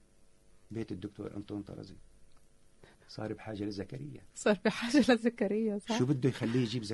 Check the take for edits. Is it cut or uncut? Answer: cut